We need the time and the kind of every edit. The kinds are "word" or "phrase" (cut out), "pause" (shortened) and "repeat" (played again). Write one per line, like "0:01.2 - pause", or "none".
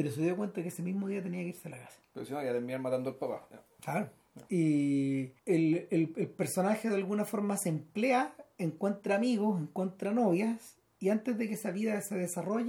0:05.4 - pause